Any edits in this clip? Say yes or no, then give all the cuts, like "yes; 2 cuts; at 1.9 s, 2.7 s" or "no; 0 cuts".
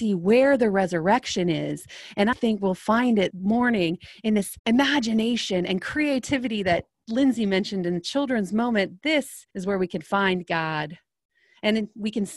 yes; 4 cuts; at 2.3 s, 3.3 s, 4.6 s, 9.5 s